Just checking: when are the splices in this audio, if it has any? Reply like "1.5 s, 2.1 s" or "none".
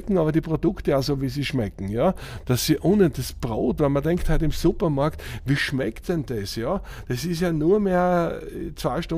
none